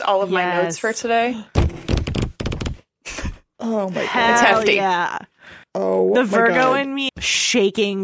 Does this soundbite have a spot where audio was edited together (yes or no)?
yes